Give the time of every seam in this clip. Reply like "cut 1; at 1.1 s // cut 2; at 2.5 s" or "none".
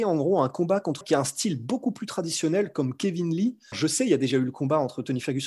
cut 1; at 1.0 s // cut 2; at 3.7 s